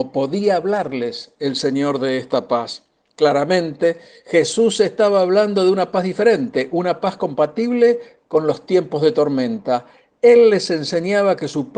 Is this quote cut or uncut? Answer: uncut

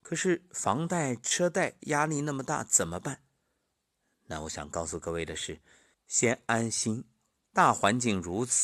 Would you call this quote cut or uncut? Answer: cut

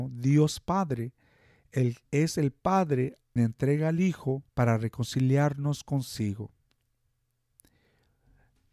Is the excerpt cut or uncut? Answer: cut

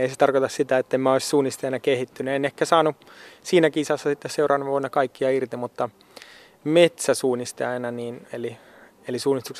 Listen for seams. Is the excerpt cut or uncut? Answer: uncut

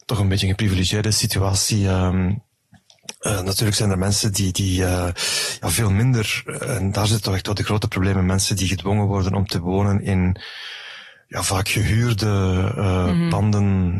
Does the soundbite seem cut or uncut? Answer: uncut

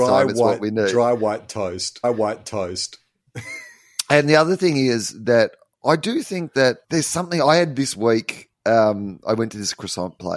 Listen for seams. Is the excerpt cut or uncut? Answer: cut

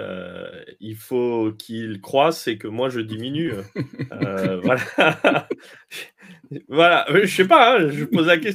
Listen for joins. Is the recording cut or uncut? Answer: uncut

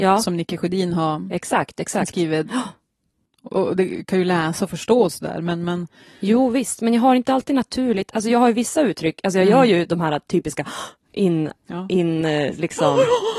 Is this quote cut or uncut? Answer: uncut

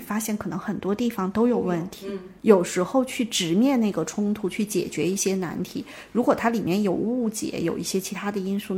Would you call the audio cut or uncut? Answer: cut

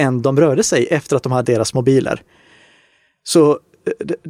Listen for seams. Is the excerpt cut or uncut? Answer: cut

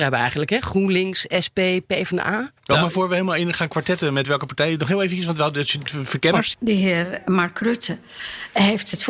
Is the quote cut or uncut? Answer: cut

